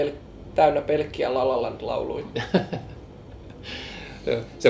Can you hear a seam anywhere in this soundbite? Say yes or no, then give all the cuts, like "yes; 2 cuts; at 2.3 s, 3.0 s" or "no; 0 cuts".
no; 0 cuts